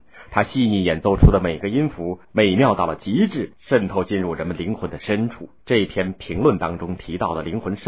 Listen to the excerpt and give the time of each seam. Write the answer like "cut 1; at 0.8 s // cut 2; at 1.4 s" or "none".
cut 1; at 2.2 s // cut 2; at 5.6 s

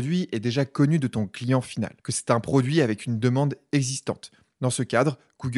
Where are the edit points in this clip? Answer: cut 1; at 2.0 s

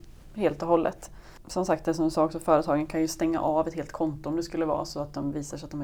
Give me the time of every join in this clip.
none

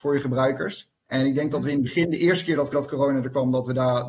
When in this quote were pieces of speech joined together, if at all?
cut 1; at 1.0 s // cut 2; at 2.7 s

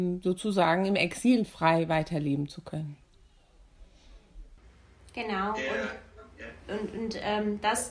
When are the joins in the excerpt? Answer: none

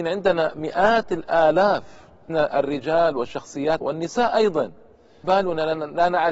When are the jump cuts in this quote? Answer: cut 1; at 2.3 s // cut 2; at 3.8 s // cut 3; at 5.2 s

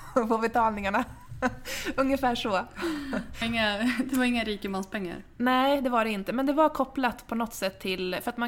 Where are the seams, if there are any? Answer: cut 1; at 3.4 s

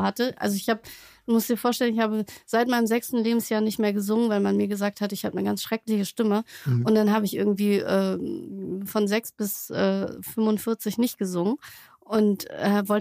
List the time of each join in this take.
none

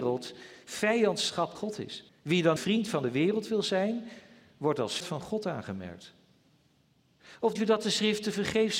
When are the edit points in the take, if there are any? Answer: cut 1; at 1.6 s // cut 2; at 2.1 s // cut 3; at 2.6 s // cut 4; at 5.0 s // cut 5; at 7.6 s

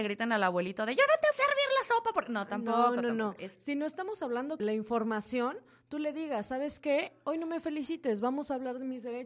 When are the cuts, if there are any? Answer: cut 1; at 1.3 s // cut 2; at 4.6 s

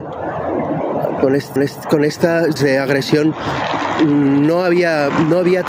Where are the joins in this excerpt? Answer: cut 1; at 1.2 s // cut 2; at 1.6 s // cut 3; at 2.6 s

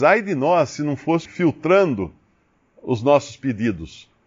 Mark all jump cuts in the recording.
cut 1; at 1.2 s

